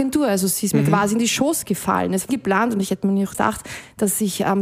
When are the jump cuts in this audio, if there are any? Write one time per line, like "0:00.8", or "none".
0:02.3
0:03.3